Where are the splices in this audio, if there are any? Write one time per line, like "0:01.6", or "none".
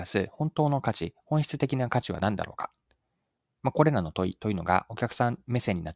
none